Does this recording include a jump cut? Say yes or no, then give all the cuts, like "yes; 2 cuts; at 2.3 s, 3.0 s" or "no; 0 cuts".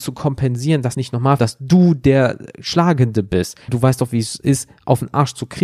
yes; 3 cuts; at 0.9 s, 1.4 s, 3.7 s